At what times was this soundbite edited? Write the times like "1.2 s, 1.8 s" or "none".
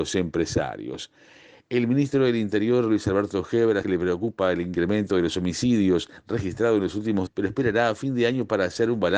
3.8 s, 7.3 s